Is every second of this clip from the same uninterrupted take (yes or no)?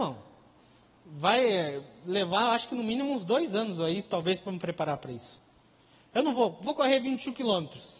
yes